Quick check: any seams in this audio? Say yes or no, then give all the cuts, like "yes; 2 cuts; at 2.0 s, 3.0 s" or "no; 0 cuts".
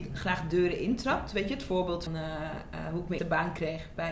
yes; 2 cuts; at 2.1 s, 3.2 s